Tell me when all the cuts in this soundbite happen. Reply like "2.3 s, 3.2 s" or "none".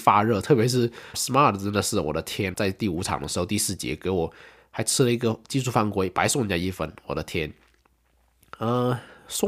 1.1 s, 2.5 s